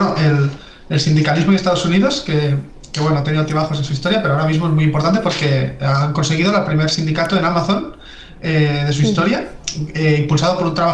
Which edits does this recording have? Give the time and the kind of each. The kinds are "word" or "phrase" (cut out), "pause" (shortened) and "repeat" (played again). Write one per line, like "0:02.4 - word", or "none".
none